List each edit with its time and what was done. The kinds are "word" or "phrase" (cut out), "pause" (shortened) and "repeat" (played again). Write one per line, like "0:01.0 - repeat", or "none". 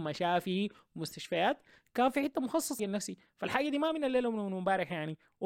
0:02.8 - word